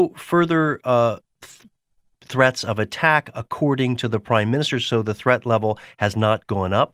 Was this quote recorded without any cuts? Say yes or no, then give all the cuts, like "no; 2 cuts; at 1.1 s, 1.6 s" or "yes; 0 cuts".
yes; 0 cuts